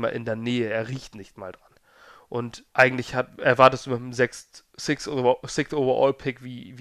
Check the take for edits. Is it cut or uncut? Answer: cut